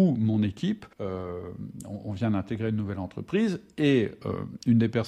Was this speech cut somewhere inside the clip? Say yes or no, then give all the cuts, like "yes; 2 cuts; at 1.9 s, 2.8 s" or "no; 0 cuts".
yes; 1 cut; at 0.9 s